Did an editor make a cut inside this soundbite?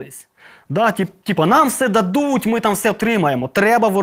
no; 0 cuts

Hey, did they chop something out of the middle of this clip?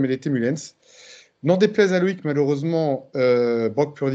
no; 0 cuts

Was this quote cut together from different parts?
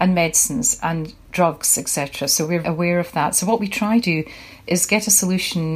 yes; 2 cuts; at 2.6 s, 4.0 s

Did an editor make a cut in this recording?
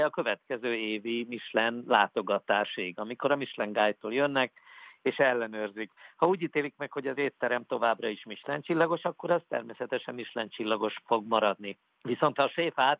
no; 0 cuts

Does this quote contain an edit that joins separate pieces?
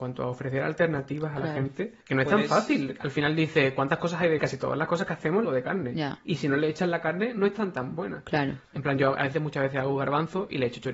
yes; 5 cuts; at 2.0 s, 3.0 s, 4.4 s, 5.4 s, 8.6 s

